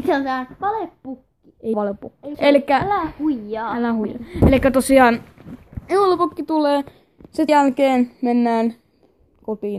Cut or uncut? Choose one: cut